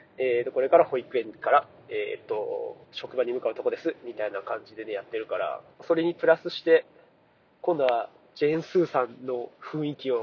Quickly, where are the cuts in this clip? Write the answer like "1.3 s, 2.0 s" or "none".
2.8 s, 5.7 s